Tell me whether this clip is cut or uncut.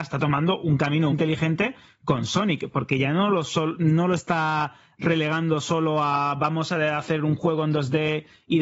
cut